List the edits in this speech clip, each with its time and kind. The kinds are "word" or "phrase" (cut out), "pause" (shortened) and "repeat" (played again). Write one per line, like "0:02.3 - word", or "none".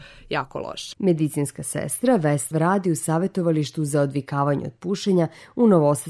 0:02.5 - word

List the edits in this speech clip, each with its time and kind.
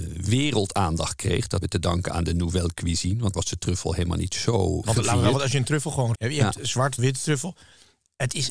0:01.6 - word
0:03.3 - word
0:04.8 - word
0:06.1 - word
0:07.0 - word

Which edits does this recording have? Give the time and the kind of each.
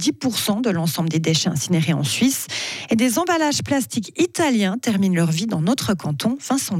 none

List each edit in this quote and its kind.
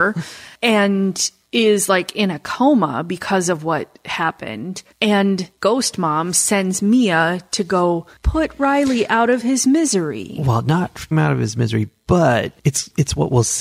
0:11.1 - phrase

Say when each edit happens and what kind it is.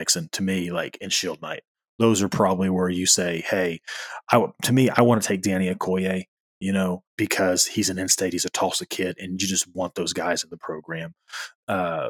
0:07.1 - pause

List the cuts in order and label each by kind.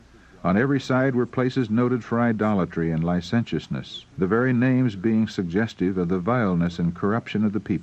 0:04.1 - pause

